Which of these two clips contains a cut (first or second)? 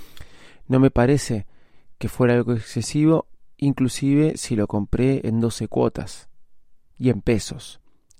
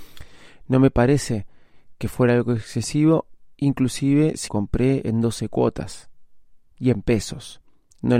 second